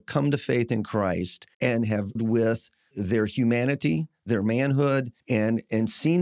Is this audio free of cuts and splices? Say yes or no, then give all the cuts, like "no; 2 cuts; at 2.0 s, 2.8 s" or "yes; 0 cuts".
no; 4 cuts; at 1.5 s, 2.2 s, 2.9 s, 5.2 s